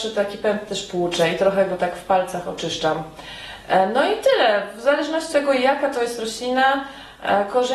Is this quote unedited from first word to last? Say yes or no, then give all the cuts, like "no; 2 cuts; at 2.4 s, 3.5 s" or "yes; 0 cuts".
no; 1 cut; at 5.3 s